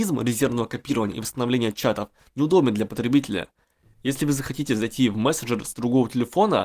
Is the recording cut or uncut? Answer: uncut